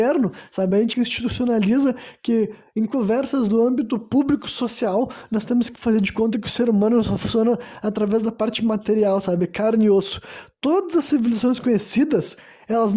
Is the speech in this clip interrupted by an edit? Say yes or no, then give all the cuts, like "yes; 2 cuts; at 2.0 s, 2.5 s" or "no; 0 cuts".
yes; 1 cut; at 0.9 s